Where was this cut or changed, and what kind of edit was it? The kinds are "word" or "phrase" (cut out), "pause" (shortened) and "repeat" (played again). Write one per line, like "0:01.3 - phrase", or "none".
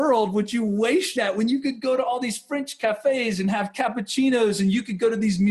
0:01.2 - phrase